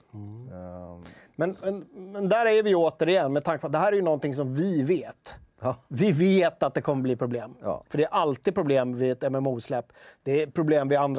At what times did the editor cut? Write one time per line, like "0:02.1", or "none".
none